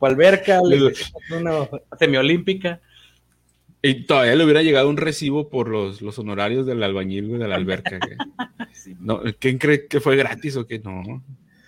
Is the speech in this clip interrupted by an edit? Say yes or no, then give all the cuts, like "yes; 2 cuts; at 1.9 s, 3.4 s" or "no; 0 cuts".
no; 0 cuts